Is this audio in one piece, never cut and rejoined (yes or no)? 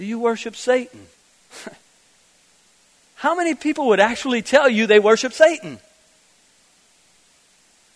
no